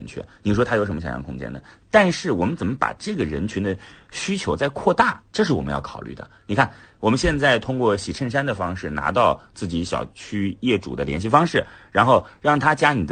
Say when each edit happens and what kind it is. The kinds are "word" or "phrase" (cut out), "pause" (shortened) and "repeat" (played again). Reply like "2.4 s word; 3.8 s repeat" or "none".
none